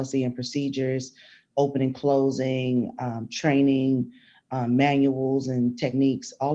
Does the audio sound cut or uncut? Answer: uncut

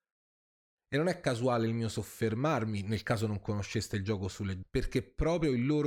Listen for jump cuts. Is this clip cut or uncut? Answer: cut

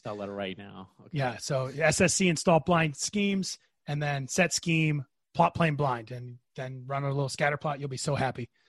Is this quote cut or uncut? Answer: uncut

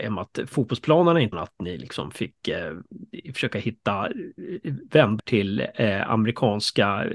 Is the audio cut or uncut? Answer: cut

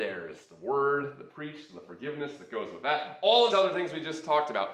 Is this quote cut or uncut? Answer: cut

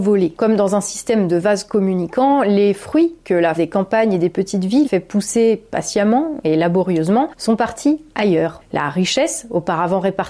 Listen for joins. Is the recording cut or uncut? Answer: cut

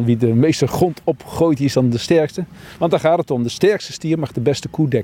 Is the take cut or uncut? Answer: uncut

